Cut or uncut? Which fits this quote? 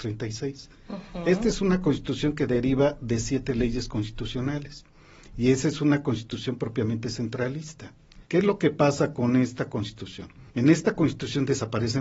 cut